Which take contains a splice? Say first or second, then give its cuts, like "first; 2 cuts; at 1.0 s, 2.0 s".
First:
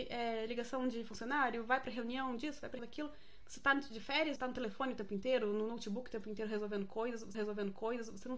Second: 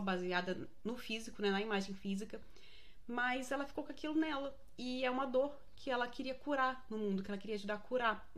first; 3 cuts; at 2.8 s, 4.4 s, 7.3 s